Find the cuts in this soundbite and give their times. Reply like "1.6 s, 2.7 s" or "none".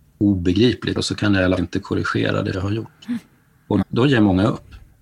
1.0 s, 1.6 s, 2.5 s, 3.8 s